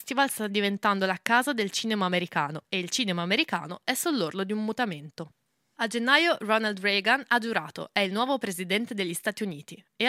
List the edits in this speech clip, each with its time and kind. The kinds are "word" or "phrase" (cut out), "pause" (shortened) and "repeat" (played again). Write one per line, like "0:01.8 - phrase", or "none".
none